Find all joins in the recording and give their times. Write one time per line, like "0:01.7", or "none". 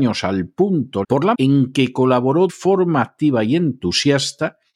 0:01.0
0:01.3
0:02.5